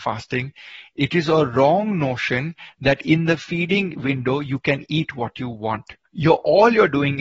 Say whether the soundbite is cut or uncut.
cut